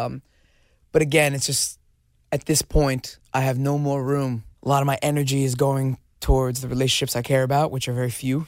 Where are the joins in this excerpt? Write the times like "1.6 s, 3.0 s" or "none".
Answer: 1.9 s, 4.5 s

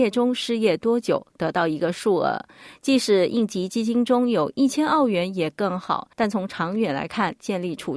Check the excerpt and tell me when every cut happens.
6.1 s

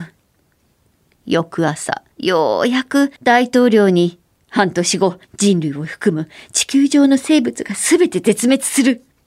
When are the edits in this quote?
2.1 s, 3.2 s, 4.3 s, 5.2 s

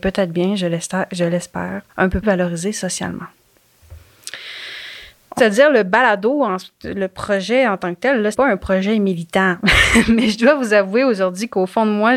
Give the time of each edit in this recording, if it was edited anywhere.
1.9 s, 2.2 s, 5.4 s, 8.3 s

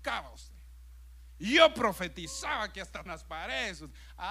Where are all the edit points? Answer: 3.1 s

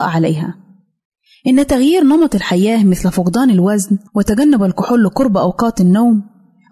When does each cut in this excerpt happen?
4.1 s

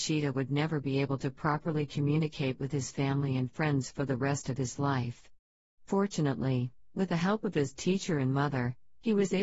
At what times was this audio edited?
none

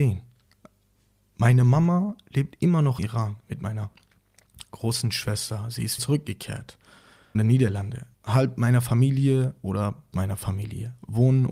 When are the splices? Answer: 3.0 s, 6.0 s, 7.3 s, 8.1 s, 10.1 s

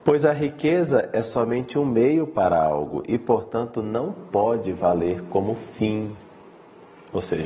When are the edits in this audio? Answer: none

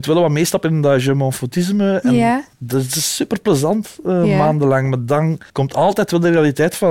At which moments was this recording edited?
2.5 s, 5.5 s

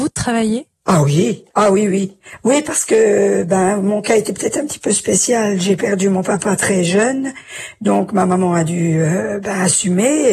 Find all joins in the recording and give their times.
1.5 s

